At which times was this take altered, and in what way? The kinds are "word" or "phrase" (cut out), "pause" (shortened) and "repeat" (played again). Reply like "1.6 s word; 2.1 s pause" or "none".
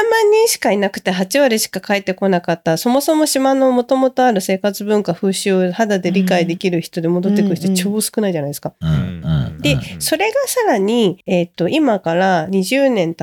11.2 s pause